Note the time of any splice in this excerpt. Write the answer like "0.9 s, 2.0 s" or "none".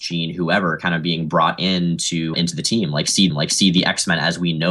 2.3 s, 3.3 s